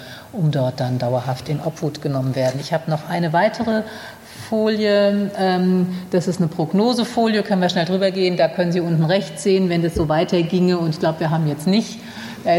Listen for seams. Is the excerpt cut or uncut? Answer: uncut